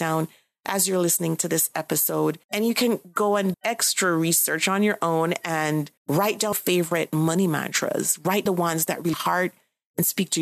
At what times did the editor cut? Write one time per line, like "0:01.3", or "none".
0:02.4
0:03.5
0:06.0
0:06.5
0:08.5
0:09.1